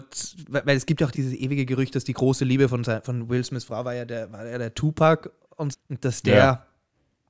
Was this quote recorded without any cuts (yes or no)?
no